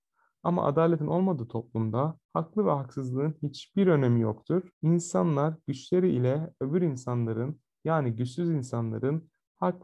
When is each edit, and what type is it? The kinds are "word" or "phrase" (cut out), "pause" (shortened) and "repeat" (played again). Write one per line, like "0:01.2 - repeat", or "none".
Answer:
0:02.2 - pause
0:04.7 - pause